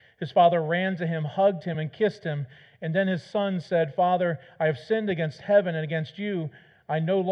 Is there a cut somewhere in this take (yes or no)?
no